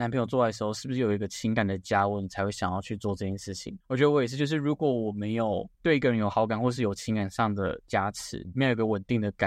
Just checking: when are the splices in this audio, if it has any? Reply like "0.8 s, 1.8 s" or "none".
3.8 s, 5.7 s